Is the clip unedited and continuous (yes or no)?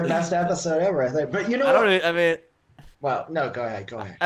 no